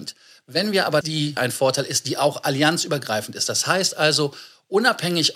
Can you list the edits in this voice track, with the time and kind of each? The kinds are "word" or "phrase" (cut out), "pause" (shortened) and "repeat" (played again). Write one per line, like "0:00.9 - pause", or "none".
0:01.0 - phrase
0:01.4 - phrase